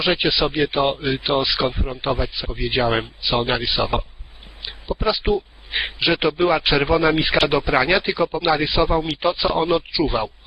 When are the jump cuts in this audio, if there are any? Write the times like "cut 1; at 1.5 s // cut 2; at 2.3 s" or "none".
cut 1; at 2.4 s // cut 2; at 3.4 s // cut 3; at 6.0 s // cut 4; at 8.4 s